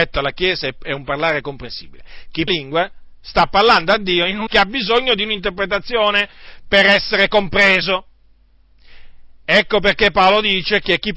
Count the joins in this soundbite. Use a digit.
2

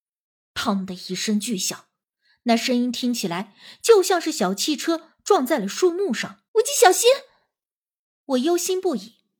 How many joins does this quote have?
1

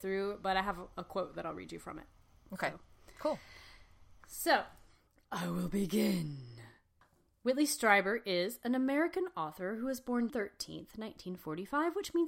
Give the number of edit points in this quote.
1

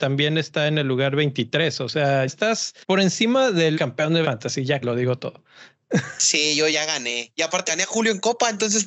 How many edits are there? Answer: 7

